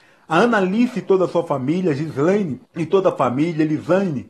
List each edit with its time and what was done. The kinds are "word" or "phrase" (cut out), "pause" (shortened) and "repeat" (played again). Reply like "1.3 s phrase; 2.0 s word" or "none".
2.6 s pause